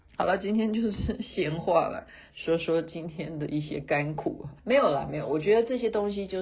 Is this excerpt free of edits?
no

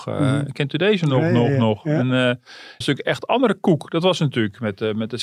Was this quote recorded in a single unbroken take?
no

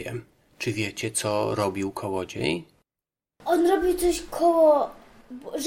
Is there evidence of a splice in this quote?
no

